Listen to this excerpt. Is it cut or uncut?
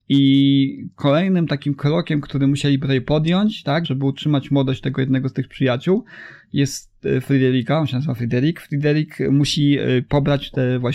cut